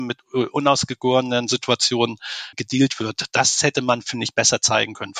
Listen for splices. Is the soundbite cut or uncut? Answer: uncut